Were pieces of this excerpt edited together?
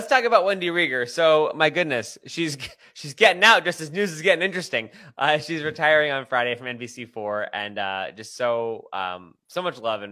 no; 0 cuts

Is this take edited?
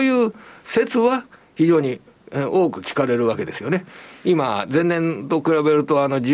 no; 0 cuts

